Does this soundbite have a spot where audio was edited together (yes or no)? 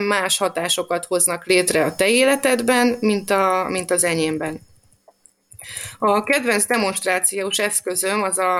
no